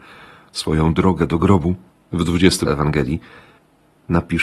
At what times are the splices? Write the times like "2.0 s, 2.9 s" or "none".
1.9 s, 2.7 s